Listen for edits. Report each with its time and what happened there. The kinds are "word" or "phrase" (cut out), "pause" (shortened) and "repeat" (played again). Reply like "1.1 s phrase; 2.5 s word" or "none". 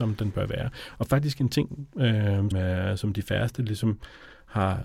2.5 s word